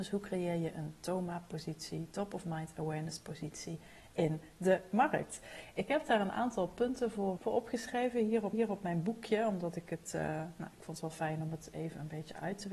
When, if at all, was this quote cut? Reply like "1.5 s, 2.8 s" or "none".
7.4 s, 8.5 s